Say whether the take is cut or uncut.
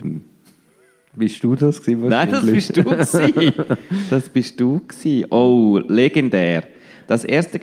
uncut